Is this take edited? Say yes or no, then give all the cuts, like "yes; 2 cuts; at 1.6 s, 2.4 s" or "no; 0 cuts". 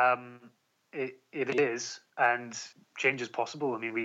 yes; 1 cut; at 2.1 s